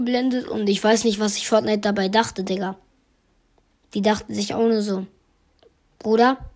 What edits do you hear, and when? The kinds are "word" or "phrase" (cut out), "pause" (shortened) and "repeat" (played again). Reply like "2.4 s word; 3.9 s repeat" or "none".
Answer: none